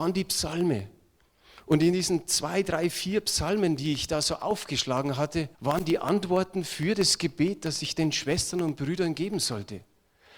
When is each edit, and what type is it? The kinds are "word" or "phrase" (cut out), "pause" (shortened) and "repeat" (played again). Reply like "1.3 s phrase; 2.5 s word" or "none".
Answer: 5.5 s pause